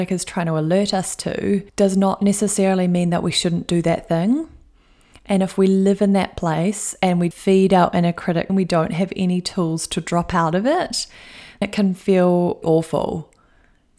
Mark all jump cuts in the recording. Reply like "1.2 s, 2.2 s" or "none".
1.7 s, 7.3 s, 8.5 s, 11.6 s, 12.6 s